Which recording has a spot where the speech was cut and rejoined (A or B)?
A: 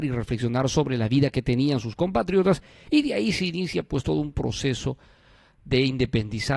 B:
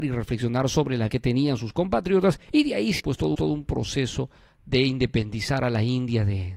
B